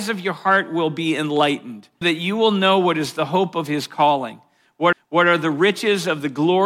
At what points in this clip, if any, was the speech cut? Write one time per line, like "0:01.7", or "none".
0:02.0
0:04.9

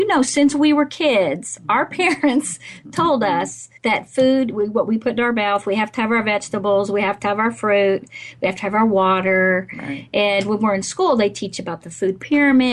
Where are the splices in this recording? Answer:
0:03.8

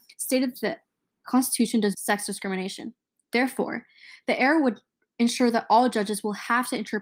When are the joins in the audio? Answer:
0:01.9

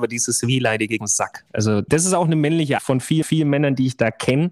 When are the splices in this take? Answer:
0:01.0
0:01.9
0:02.8
0:03.2

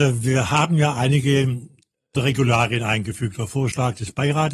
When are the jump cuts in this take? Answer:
0:02.1

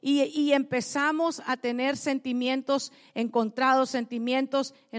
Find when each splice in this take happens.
none

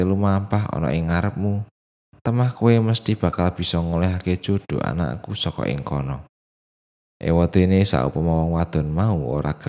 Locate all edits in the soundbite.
none

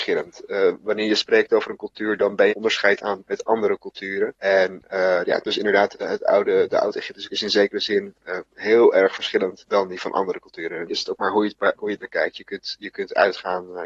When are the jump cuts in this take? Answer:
0:02.5
0:03.2
0:05.9
0:07.3
0:10.9

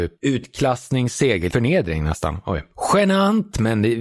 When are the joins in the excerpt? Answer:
0:01.5

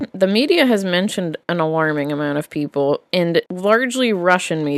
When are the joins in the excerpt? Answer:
0:01.4
0:03.5

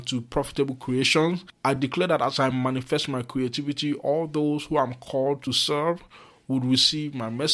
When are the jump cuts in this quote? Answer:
none

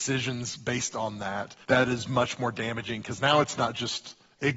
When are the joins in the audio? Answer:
0:01.6

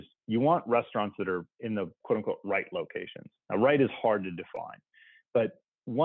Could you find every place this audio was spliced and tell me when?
none

